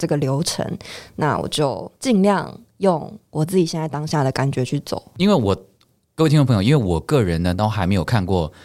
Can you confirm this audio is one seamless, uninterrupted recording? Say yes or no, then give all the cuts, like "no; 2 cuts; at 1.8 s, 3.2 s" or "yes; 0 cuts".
no; 1 cut; at 2.0 s